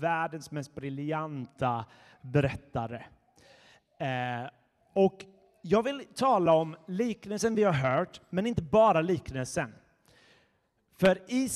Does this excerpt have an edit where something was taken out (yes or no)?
no